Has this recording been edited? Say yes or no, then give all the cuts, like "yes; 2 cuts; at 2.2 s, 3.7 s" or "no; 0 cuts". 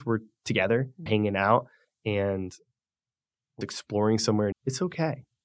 yes; 3 cuts; at 1.1 s, 3.6 s, 4.5 s